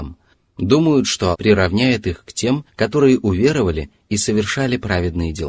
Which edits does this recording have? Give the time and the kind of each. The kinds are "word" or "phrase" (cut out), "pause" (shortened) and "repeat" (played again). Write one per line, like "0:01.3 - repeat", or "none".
0:01.3 - word
0:02.7 - pause